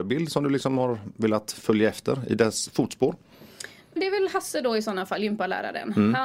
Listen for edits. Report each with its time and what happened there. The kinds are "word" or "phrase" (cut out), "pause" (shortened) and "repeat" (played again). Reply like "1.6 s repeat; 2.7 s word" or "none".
4.0 s word

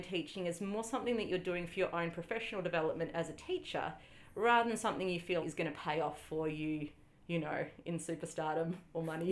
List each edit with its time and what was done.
5.4 s word

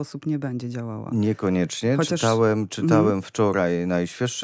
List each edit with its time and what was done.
none

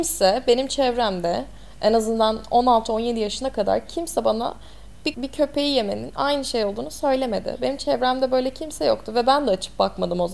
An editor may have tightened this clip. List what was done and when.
5.1 s word

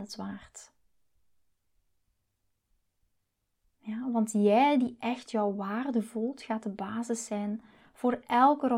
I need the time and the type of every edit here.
none

